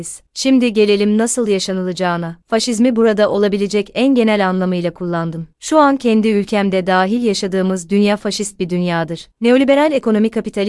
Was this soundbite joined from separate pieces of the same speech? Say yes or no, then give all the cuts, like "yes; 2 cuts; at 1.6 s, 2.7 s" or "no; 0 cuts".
no; 0 cuts